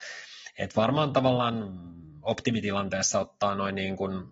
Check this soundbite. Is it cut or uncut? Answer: uncut